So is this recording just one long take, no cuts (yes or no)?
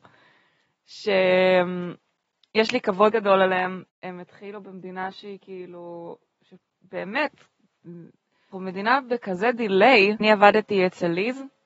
no